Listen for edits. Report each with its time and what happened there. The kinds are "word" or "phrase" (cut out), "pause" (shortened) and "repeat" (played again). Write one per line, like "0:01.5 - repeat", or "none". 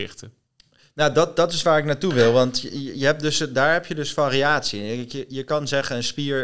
none